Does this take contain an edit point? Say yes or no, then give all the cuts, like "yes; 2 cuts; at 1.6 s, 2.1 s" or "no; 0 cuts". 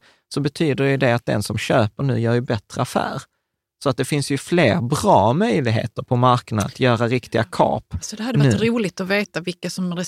no; 0 cuts